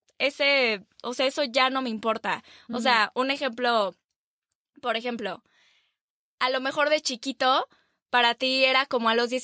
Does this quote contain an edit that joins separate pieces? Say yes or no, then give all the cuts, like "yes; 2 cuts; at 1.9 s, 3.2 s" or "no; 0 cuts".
no; 0 cuts